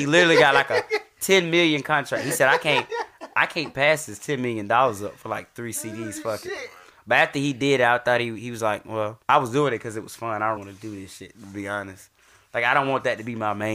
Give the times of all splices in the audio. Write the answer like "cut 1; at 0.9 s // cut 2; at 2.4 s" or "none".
cut 1; at 9.2 s // cut 2; at 10.6 s

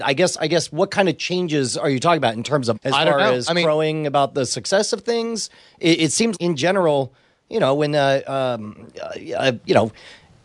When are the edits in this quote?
cut 1; at 2.7 s // cut 2; at 6.3 s

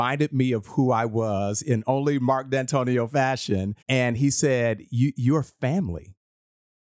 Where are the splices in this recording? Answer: cut 1; at 3.8 s

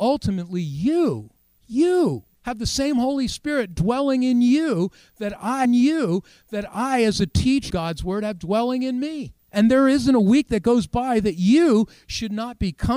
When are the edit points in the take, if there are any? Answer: cut 1; at 2.3 s // cut 2; at 5.6 s // cut 3; at 7.7 s // cut 4; at 9.4 s

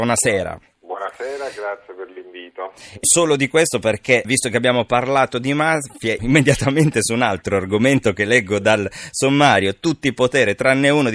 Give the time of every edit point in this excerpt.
cut 1; at 3.0 s // cut 2; at 4.2 s // cut 3; at 6.2 s

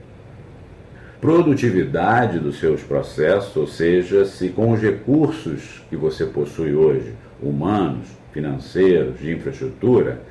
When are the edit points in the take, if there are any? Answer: cut 1; at 1.2 s

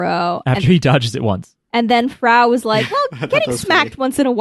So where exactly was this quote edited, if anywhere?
cut 1; at 1.6 s

